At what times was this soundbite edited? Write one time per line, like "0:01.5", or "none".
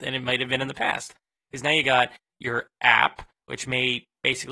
none